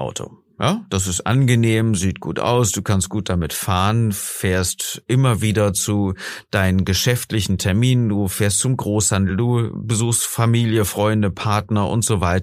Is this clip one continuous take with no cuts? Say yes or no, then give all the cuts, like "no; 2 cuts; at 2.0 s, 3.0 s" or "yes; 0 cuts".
yes; 0 cuts